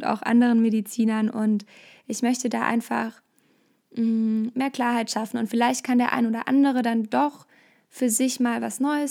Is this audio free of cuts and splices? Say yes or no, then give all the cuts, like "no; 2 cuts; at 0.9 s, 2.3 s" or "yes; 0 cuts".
yes; 0 cuts